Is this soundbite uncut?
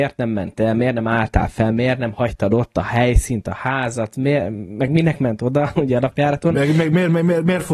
yes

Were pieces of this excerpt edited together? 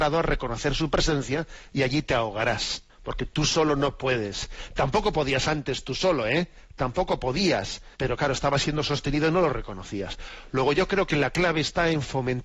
yes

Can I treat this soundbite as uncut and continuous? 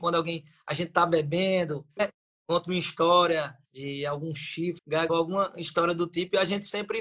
no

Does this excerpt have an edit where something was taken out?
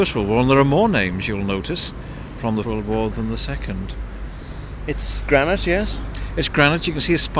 yes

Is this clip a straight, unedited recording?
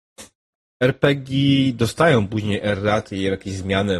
yes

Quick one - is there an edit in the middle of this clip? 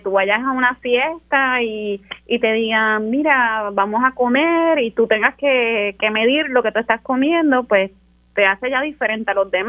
no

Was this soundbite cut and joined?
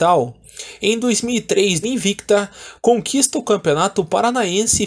yes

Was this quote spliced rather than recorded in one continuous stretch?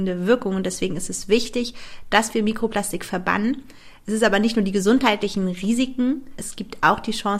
no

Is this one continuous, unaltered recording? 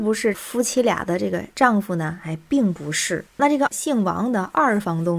no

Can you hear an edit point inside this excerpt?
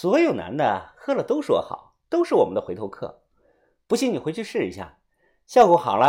no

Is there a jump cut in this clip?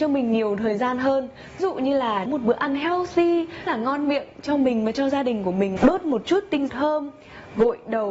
yes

